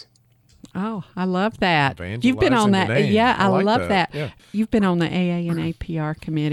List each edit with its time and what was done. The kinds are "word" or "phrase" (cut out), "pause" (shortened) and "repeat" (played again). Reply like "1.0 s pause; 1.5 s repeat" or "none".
none